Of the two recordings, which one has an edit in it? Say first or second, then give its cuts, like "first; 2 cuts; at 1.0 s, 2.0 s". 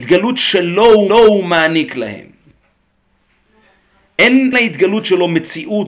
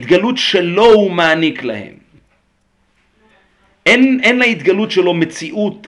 first; 2 cuts; at 1.1 s, 4.5 s